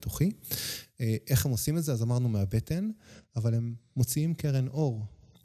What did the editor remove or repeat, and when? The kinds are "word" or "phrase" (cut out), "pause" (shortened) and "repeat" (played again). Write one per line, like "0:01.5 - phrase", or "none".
none